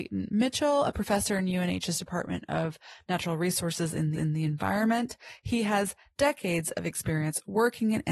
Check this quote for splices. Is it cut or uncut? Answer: cut